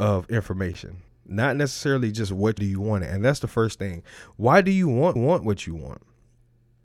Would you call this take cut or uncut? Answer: cut